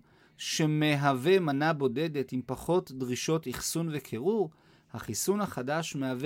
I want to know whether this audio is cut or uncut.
uncut